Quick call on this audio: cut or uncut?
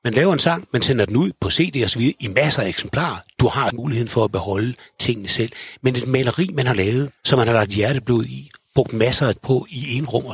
cut